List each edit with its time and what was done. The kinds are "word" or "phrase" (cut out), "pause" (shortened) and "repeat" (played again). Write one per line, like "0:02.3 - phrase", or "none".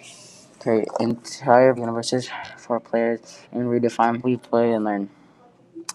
0:01.8 - word
0:03.4 - pause
0:04.2 - word